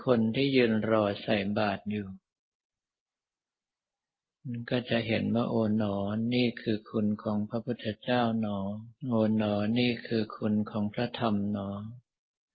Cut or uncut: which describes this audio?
cut